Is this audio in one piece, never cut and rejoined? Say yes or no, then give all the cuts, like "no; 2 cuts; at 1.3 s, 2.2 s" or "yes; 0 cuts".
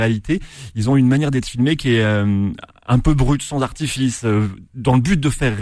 yes; 0 cuts